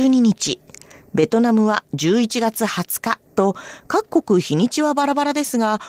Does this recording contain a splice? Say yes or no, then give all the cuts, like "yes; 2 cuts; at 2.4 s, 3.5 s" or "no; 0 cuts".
yes; 1 cut; at 3.3 s